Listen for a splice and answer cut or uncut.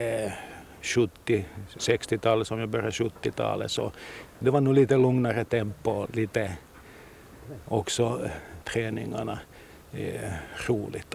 cut